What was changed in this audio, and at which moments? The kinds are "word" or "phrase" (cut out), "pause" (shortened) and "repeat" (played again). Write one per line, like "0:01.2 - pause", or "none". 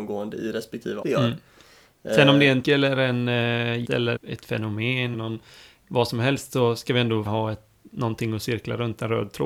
0:01.0 - word
0:02.6 - word
0:03.8 - word
0:04.2 - word
0:05.1 - word
0:07.3 - word